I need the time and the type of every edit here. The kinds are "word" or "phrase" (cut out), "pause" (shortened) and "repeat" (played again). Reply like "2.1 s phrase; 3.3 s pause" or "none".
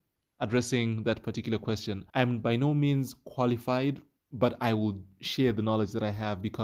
2.1 s pause; 4.2 s pause